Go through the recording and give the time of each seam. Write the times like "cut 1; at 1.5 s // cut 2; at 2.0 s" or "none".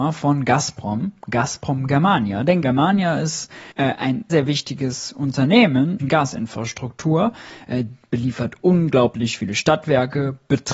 cut 1; at 2.6 s // cut 2; at 3.7 s // cut 3; at 4.3 s // cut 4; at 6.0 s